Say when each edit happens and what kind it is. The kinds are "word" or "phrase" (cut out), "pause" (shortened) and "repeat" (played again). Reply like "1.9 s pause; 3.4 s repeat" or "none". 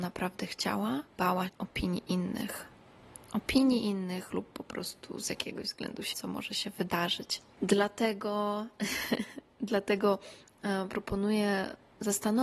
1.1 s word; 1.5 s word; 6.1 s word